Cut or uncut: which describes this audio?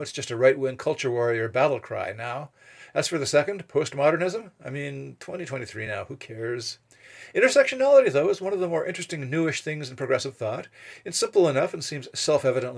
uncut